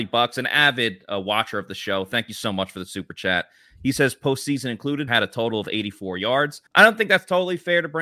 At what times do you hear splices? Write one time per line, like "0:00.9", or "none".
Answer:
0:05.1
0:06.7

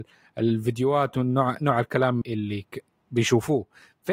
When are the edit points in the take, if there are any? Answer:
0:02.2

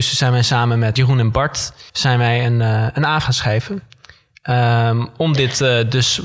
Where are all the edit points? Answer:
0:01.0
0:01.9
0:03.2

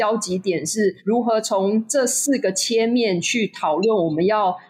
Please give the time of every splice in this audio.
0:01.0

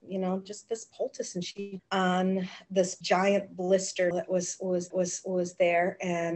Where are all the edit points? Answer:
0:01.8
0:03.0
0:04.1
0:04.9

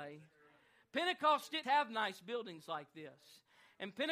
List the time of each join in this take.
0:01.6

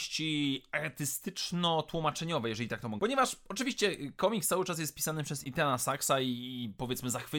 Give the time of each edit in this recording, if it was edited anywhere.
0:03.0
0:05.4

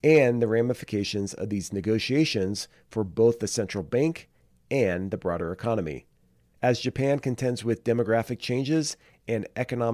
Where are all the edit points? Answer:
none

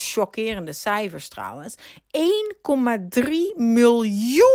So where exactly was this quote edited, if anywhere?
none

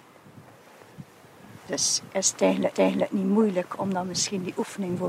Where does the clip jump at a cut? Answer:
0:01.6
0:02.7

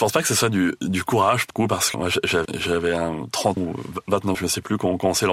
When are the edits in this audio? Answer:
0:01.5
0:01.9
0:02.4
0:03.6
0:04.3

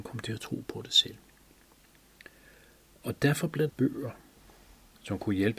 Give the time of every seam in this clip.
0:03.7

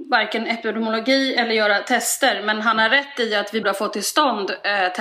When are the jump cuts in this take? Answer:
0:03.6

